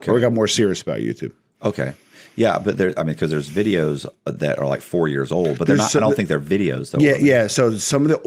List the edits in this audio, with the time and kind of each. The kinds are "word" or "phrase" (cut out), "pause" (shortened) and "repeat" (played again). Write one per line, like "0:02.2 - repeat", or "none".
none